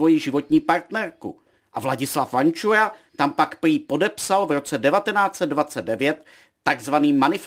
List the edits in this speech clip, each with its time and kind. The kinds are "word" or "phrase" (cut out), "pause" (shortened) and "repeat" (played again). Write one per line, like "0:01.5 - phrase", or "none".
none